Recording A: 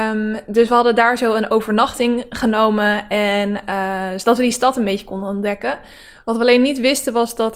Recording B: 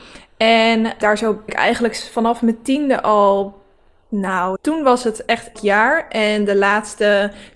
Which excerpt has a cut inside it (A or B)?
B